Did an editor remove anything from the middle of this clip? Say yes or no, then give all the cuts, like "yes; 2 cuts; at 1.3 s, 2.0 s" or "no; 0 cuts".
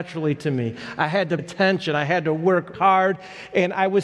yes; 2 cuts; at 1.4 s, 2.7 s